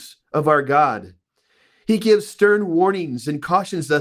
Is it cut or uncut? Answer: uncut